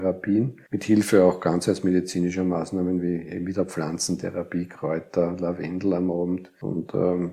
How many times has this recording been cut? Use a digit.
0